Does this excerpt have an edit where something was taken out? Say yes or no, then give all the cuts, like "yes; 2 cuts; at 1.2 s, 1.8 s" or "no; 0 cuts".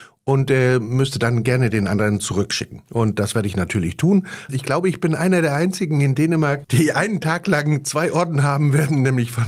yes; 1 cut; at 2.9 s